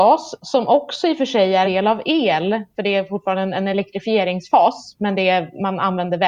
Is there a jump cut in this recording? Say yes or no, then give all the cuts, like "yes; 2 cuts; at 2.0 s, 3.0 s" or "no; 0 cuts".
yes; 1 cut; at 1.6 s